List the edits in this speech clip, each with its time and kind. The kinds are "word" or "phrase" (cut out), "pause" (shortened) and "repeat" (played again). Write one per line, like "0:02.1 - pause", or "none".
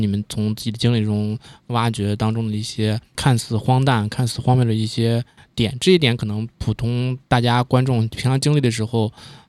0:03.1 - word